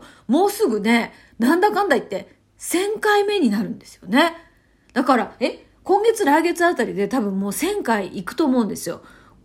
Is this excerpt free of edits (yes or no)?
yes